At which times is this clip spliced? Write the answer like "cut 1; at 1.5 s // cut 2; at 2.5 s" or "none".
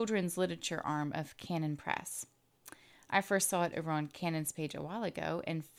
cut 1; at 3.7 s

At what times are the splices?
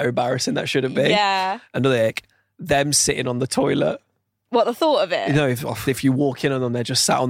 cut 1; at 5.9 s

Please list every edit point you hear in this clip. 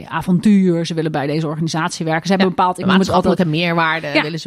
none

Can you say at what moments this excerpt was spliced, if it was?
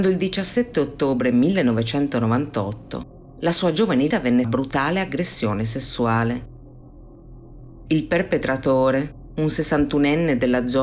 cut 1; at 4.1 s // cut 2; at 4.4 s

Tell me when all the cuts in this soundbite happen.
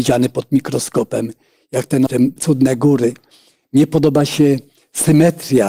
cut 1; at 2.1 s // cut 2; at 2.4 s

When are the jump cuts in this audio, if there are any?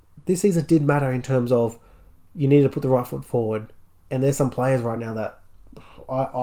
none

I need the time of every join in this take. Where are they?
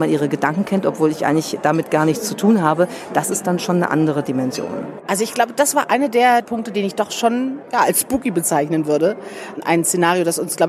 none

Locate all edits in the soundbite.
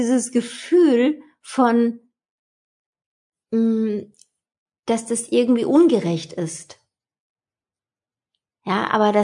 none

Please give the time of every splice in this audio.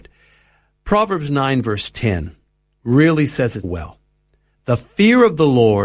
cut 1; at 3.6 s

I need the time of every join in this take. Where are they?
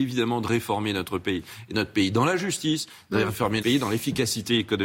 cut 1; at 1.7 s // cut 2; at 3.6 s

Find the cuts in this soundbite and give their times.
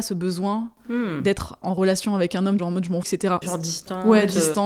cut 1; at 1.6 s // cut 2; at 2.6 s // cut 3; at 3.0 s // cut 4; at 3.4 s

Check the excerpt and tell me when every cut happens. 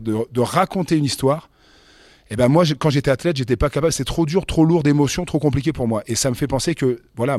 none

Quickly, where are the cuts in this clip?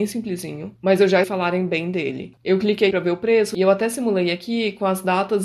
cut 1; at 1.2 s // cut 2; at 2.9 s

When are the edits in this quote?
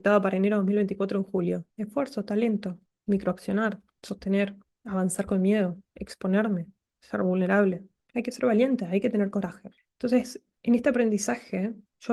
cut 1; at 1.7 s

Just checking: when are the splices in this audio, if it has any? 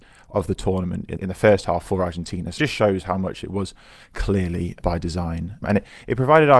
cut 1; at 1.2 s // cut 2; at 2.6 s // cut 3; at 4.8 s // cut 4; at 5.6 s

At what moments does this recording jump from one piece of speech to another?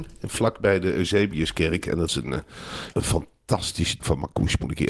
cut 1; at 2.1 s // cut 2; at 2.9 s // cut 3; at 4.0 s

